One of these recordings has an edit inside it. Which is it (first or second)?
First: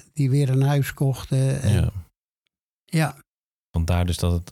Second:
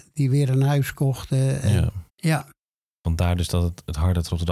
second